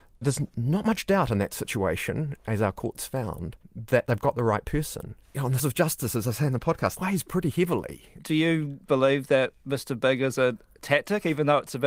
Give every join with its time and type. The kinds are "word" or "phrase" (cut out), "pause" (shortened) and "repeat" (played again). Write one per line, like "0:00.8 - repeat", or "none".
0:05.2 - pause
0:05.6 - word
0:07.0 - word